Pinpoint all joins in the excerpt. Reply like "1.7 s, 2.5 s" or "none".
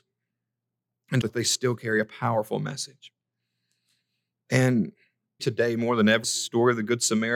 1.2 s, 5.4 s, 6.2 s